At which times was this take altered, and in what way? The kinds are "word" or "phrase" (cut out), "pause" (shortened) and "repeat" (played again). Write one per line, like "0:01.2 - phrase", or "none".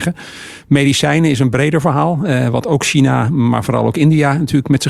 none